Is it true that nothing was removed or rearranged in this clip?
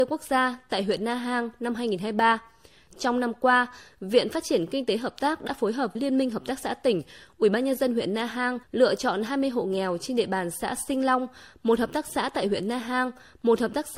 no; 2 cuts; at 5.9 s, 8.6 s

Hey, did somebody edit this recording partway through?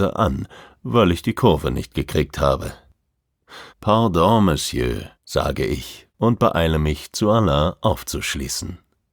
yes; 2 cuts; at 3.7 s, 5.2 s

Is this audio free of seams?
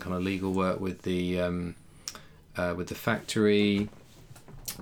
yes; 0 cuts

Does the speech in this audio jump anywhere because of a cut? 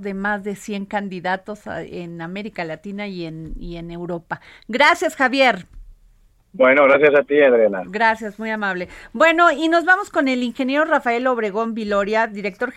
no; 0 cuts

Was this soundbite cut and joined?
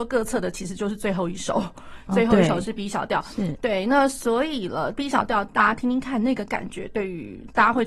no; 0 cuts

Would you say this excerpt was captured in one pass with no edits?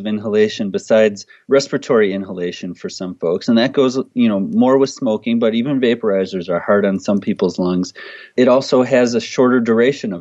yes; 0 cuts

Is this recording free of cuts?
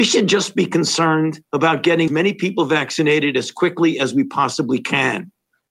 no; 2 cuts; at 1.4 s, 2.1 s

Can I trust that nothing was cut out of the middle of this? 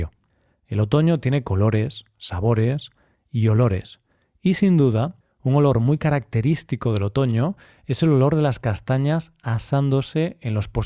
yes; 0 cuts

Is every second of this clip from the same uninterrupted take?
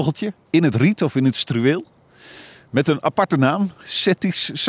yes; 0 cuts

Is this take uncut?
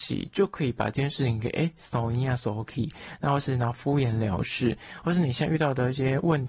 yes; 0 cuts

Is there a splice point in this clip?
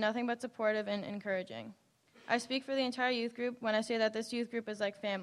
no; 0 cuts

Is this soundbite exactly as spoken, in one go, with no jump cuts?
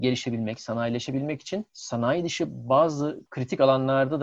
no; 2 cuts; at 1.7 s, 3.3 s

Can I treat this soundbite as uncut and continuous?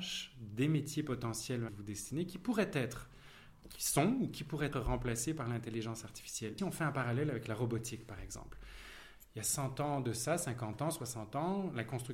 no; 3 cuts; at 1.7 s, 4.7 s, 6.6 s

